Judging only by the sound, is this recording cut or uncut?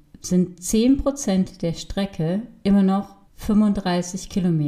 cut